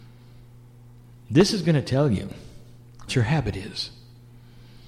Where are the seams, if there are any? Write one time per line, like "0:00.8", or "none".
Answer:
0:03.1